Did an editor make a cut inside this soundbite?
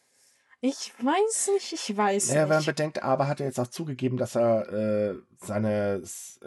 no; 0 cuts

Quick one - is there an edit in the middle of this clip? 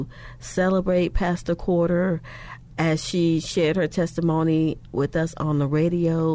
no; 0 cuts

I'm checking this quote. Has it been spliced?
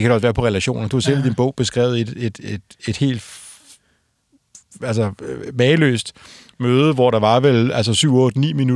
no; 0 cuts

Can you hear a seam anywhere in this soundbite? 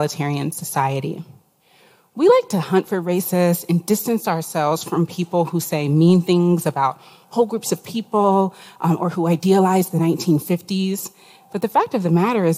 no; 0 cuts

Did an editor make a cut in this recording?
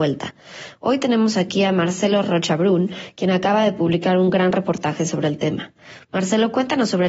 no; 0 cuts

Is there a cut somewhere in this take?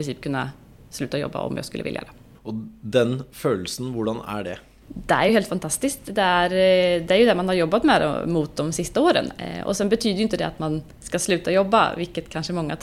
no; 0 cuts

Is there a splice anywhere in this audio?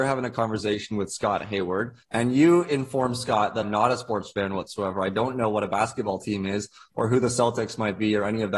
yes; 2 cuts; at 2.0 s, 3.6 s

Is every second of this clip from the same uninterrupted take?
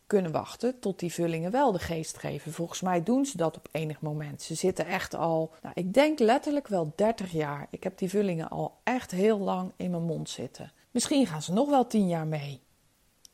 no; 2 cuts; at 5.6 s, 10.8 s

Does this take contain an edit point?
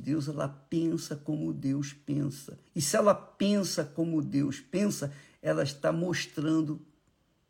yes; 1 cut; at 2.7 s

